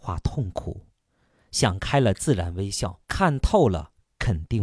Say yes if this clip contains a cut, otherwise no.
yes